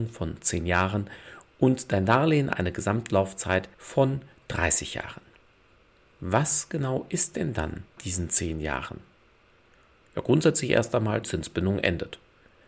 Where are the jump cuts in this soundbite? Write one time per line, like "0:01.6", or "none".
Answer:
0:03.7
0:08.0
0:11.2